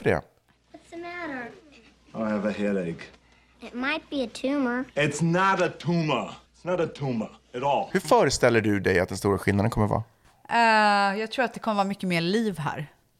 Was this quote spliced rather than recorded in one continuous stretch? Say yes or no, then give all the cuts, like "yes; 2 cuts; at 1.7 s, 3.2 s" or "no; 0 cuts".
yes; 2 cuts; at 4.9 s, 6.5 s